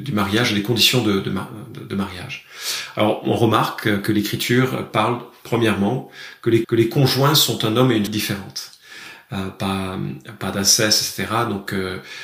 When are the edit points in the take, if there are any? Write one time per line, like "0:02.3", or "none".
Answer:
0:06.6
0:08.1